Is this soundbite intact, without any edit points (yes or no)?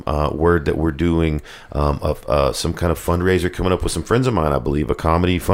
yes